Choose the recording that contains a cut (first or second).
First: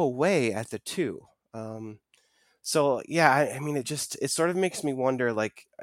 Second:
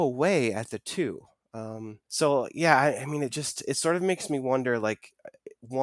second